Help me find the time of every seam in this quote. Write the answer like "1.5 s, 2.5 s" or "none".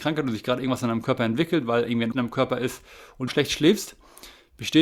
2.1 s, 3.3 s